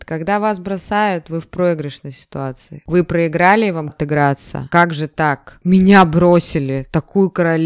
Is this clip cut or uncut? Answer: cut